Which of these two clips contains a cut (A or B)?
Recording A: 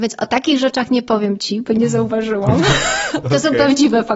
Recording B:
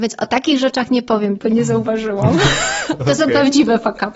B